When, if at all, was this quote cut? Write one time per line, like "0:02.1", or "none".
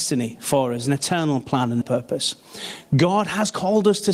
0:01.8